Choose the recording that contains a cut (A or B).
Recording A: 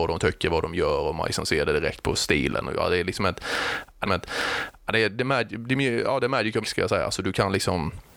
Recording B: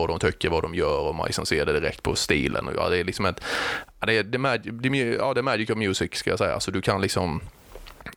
A